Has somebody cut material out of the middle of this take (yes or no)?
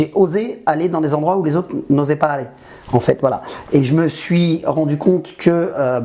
no